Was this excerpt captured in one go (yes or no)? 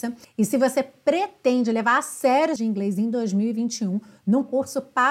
no